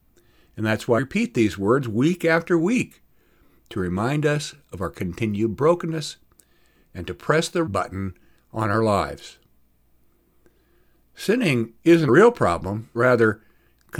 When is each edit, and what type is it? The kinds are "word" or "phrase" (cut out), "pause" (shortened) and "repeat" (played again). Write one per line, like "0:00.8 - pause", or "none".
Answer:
0:01.0 - word
0:07.7 - word
0:12.1 - word
0:12.9 - word